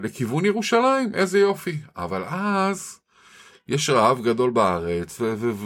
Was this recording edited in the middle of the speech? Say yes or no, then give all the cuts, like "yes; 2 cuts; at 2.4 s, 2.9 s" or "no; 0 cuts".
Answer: no; 0 cuts